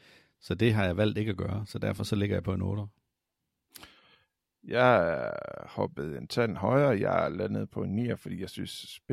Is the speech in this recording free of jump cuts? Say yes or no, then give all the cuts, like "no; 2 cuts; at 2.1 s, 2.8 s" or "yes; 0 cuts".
yes; 0 cuts